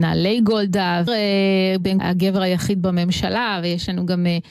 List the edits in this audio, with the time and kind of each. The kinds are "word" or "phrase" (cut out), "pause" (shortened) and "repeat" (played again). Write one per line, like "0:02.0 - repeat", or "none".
0:01.1 - phrase
0:02.0 - phrase